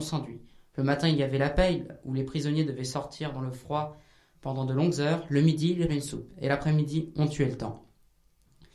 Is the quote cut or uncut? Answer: cut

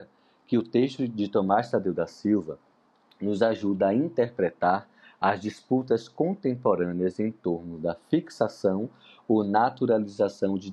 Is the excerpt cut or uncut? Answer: uncut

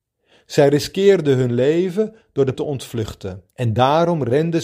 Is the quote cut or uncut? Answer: cut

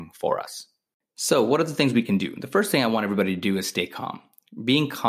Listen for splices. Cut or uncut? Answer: uncut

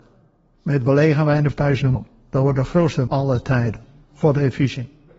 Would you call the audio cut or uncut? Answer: cut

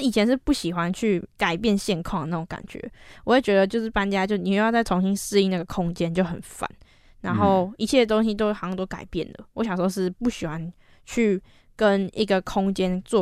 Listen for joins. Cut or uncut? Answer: uncut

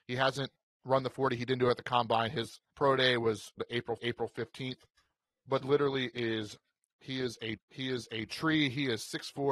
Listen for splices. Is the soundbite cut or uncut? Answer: cut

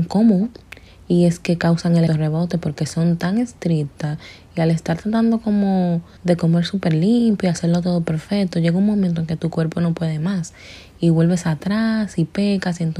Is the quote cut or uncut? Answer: cut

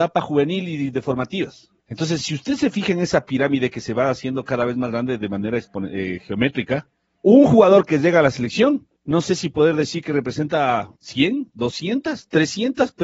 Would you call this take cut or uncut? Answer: cut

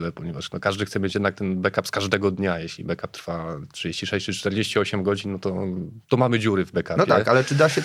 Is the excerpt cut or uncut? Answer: cut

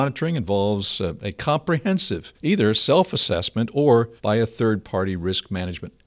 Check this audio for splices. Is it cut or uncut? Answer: cut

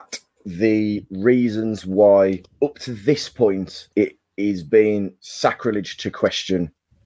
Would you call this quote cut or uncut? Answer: cut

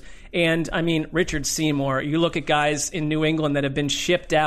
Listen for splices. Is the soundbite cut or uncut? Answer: uncut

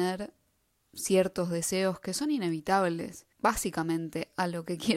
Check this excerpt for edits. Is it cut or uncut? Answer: cut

